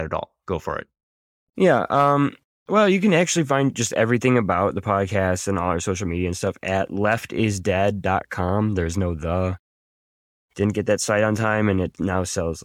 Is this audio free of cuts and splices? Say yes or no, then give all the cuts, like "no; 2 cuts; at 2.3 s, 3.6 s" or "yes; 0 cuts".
yes; 0 cuts